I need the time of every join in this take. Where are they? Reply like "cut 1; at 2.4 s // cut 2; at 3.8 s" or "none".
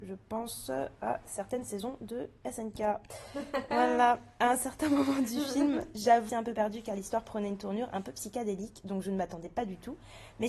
cut 1; at 6.3 s